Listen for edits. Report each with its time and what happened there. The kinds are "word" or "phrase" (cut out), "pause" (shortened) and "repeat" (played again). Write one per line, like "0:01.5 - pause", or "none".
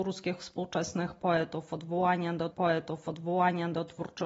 0:02.5 - repeat